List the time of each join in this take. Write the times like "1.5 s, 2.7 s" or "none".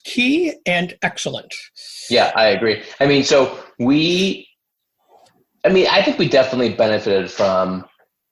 none